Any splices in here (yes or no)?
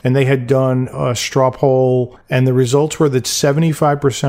no